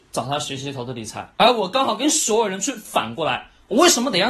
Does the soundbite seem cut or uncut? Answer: cut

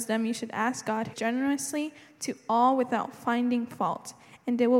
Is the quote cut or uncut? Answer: cut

